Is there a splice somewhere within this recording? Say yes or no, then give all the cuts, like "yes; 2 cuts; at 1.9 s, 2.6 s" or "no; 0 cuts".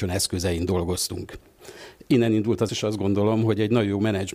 yes; 1 cut; at 2.7 s